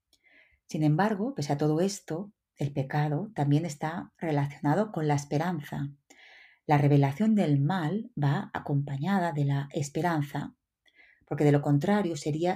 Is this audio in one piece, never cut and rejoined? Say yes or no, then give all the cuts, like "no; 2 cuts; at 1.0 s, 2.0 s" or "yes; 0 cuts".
yes; 0 cuts